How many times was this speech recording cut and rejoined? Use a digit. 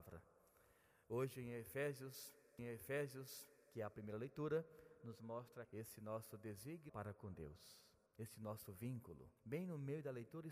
5